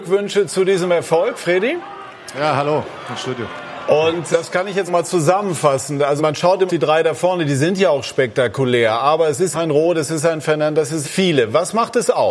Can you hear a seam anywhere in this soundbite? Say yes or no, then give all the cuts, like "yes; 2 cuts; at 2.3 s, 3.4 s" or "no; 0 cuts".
yes; 6 cuts; at 4.3 s, 4.9 s, 6.2 s, 6.7 s, 9.5 s, 11.0 s